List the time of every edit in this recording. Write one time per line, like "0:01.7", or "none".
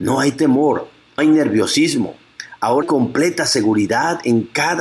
0:01.2
0:02.8

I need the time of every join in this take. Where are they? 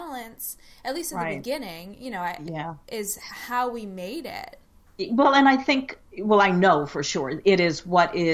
0:06.1

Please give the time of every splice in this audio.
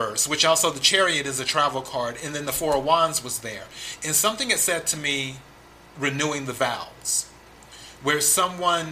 none

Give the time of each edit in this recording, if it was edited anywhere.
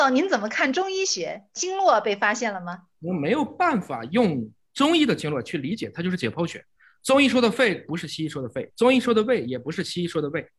none

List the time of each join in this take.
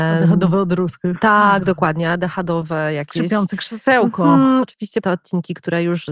0:04.6
0:05.0

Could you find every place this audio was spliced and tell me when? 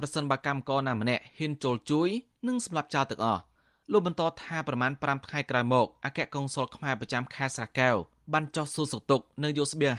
none

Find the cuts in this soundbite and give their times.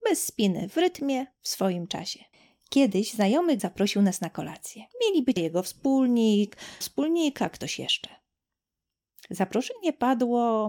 0:02.3
0:03.6
0:04.9
0:05.4
0:06.8

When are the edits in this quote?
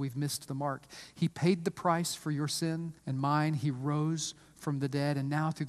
0:03.0

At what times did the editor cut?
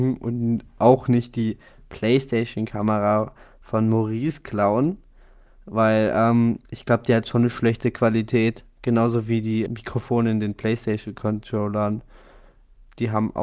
0:06.7
0:09.7

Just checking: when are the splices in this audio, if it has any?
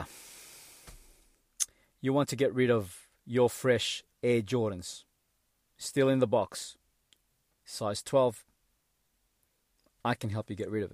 none

